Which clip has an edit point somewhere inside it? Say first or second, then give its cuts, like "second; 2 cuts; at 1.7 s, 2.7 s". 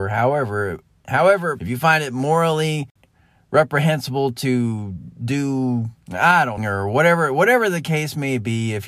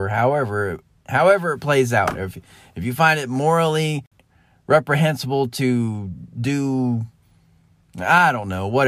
first; 3 cuts; at 1.6 s, 6.0 s, 6.6 s